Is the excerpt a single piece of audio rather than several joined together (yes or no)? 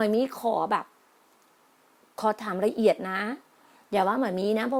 yes